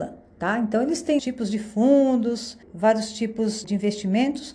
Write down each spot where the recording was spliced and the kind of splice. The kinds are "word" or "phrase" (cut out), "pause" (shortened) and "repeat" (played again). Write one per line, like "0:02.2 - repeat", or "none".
0:01.2 - phrase
0:02.6 - pause
0:03.6 - word